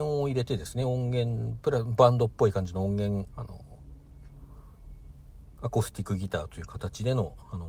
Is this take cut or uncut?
cut